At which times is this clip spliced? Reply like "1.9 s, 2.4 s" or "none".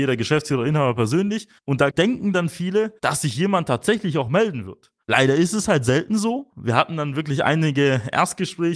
1.6 s, 3.0 s

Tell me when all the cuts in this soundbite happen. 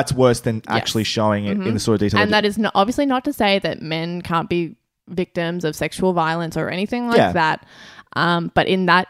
none

